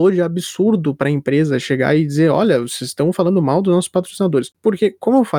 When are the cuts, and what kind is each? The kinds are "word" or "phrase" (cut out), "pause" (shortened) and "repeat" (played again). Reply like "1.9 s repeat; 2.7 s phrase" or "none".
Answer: none